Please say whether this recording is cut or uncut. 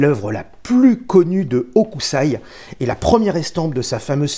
uncut